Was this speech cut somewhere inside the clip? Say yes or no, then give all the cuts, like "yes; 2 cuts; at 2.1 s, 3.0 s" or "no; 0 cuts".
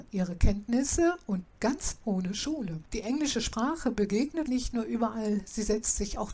yes; 3 cuts; at 1.5 s, 2.9 s, 4.5 s